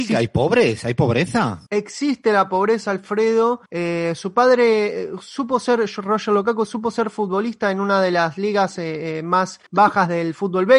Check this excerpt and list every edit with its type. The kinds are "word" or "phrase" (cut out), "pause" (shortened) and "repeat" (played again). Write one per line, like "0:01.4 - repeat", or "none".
0:01.7 - pause
0:03.7 - pause
0:09.7 - pause